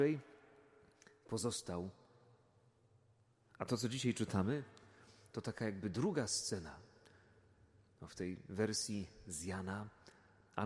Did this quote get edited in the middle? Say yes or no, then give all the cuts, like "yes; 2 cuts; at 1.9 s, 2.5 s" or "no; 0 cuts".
no; 0 cuts